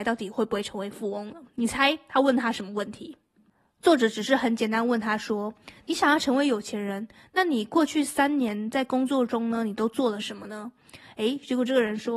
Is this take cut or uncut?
uncut